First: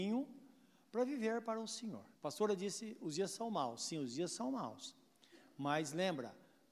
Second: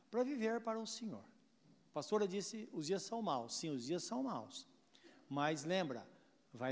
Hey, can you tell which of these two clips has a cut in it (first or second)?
first